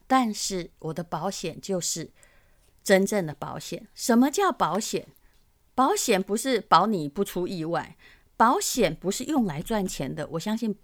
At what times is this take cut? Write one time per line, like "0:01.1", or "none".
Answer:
none